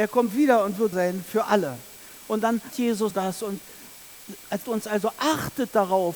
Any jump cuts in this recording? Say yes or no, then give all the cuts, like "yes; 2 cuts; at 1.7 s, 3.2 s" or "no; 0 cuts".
yes; 4 cuts; at 0.9 s, 2.7 s, 3.1 s, 4.6 s